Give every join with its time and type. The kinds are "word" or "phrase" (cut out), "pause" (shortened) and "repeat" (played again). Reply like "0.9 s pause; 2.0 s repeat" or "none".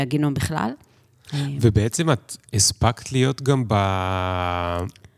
none

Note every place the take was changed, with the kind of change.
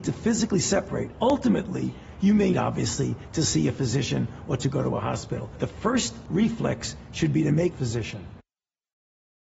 2.5 s word; 7.7 s phrase

